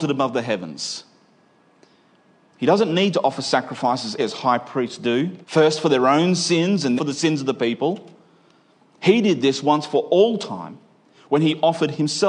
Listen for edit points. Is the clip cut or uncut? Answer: cut